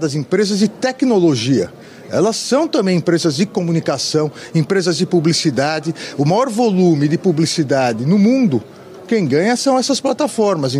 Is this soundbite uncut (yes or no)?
yes